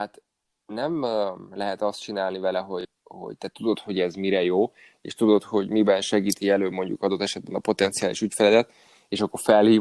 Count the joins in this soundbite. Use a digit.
0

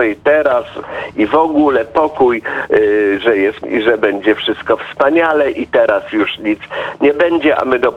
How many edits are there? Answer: 1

